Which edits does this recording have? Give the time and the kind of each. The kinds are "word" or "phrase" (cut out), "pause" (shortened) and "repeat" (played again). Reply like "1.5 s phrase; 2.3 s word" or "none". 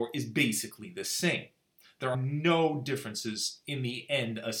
2.1 s word